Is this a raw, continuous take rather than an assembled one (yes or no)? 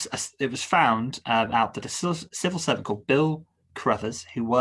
yes